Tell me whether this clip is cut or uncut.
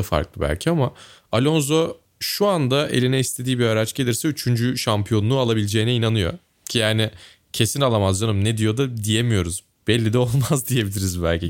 uncut